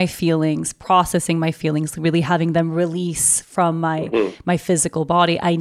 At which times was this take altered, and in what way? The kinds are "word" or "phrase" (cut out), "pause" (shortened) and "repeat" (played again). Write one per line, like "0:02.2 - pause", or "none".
none

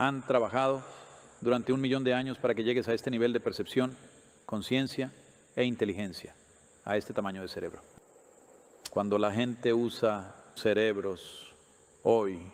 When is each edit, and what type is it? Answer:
0:10.6 - word

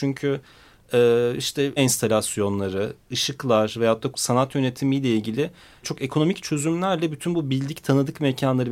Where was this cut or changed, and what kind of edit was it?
0:01.8 - word
0:04.1 - word
0:05.8 - word

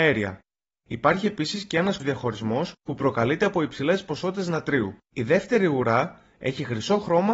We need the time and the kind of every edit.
0:02.0 - word
0:05.0 - pause

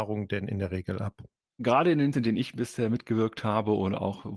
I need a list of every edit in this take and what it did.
0:02.1 - word

